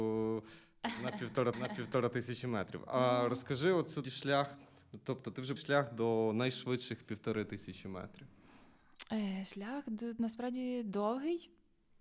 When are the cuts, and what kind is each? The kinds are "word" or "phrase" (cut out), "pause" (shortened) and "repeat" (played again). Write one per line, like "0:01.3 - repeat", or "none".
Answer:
0:01.5 - repeat
0:04.0 - word
0:05.6 - phrase